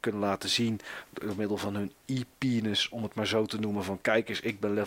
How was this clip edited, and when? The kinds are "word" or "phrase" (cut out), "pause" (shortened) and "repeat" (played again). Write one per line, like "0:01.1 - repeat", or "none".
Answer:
none